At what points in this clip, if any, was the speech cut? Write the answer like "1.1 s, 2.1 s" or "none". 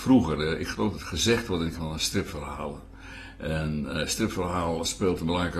0.9 s, 1.7 s